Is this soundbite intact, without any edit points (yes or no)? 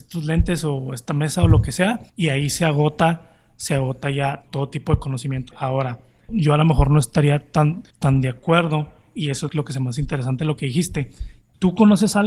no